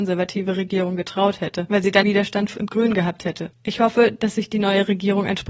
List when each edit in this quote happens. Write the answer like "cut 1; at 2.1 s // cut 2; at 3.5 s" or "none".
cut 1; at 2.0 s // cut 2; at 2.5 s // cut 3; at 3.6 s